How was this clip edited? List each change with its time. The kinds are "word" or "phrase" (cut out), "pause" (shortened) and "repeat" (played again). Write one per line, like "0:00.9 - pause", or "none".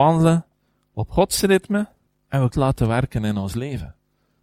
0:02.1 - pause
0:02.5 - phrase